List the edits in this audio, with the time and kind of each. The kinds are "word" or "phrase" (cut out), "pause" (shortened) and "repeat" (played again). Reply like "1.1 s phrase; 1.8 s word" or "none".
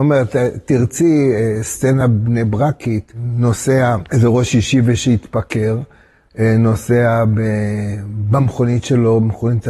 none